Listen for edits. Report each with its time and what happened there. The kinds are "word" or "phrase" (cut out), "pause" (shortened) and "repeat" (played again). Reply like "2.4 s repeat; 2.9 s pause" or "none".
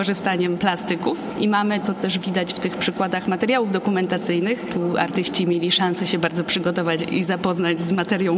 1.8 s word